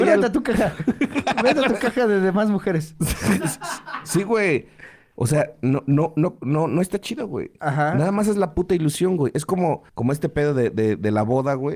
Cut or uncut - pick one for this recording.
cut